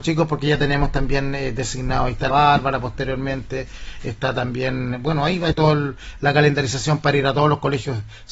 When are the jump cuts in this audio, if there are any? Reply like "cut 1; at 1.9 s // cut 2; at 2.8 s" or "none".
cut 1; at 2.3 s // cut 2; at 5.5 s